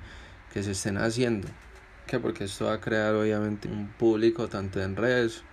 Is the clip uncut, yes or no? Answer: no